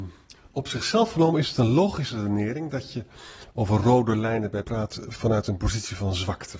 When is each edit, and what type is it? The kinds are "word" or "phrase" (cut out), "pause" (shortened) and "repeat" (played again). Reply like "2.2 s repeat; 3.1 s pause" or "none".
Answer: 4.6 s word